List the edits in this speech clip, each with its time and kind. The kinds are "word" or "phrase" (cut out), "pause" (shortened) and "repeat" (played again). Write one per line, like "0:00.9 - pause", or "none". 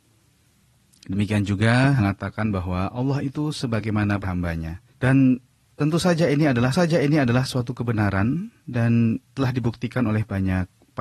0:02.0 - phrase
0:04.2 - word
0:04.9 - pause
0:06.7 - repeat
0:08.6 - pause